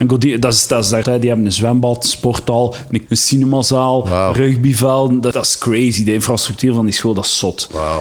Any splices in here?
yes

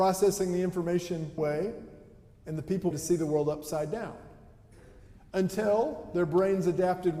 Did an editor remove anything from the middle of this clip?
yes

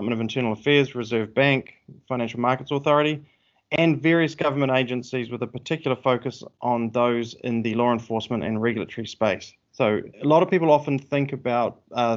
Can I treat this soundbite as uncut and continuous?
no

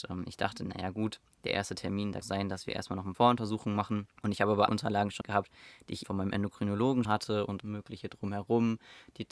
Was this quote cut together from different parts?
yes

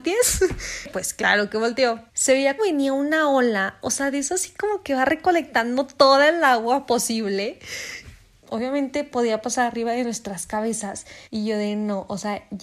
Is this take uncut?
no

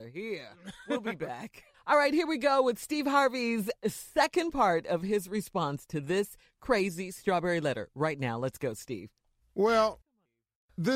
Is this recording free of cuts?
no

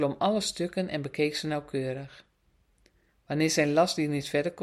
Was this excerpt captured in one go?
yes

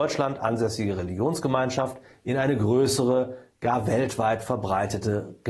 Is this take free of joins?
yes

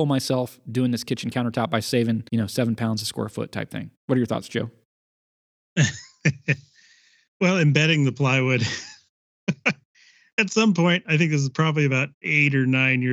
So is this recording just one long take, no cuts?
no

